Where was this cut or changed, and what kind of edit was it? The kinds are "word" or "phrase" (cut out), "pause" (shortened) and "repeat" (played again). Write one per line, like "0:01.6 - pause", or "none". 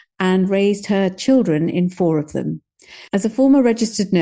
0:03.1 - pause